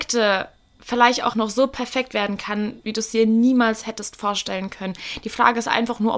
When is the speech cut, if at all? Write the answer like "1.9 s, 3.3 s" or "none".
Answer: 1.3 s